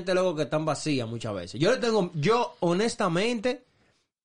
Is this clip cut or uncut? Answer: uncut